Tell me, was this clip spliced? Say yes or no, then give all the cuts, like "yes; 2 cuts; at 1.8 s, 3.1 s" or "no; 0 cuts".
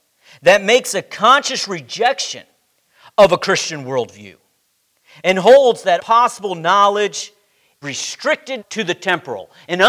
yes; 3 cuts; at 6.0 s, 7.8 s, 8.6 s